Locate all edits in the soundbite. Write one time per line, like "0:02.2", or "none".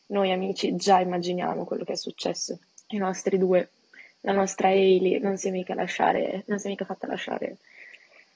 0:02.7